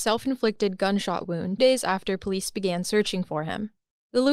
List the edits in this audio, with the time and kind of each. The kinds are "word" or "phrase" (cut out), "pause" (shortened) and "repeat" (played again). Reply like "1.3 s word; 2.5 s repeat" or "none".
1.6 s word